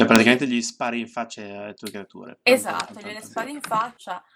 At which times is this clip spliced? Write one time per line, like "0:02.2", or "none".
none